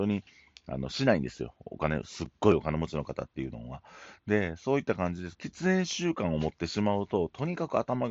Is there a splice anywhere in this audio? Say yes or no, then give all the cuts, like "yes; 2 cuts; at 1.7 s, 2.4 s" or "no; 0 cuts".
yes; 1 cut; at 5.3 s